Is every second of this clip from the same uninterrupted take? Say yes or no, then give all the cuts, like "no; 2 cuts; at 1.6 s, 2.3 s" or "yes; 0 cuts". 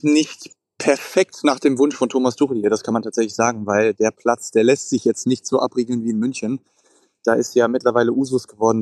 yes; 0 cuts